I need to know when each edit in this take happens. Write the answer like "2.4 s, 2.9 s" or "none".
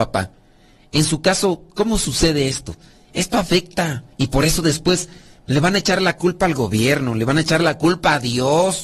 4.1 s